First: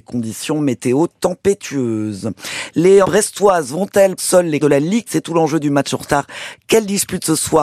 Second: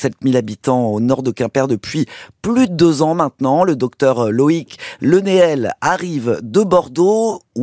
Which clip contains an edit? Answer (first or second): first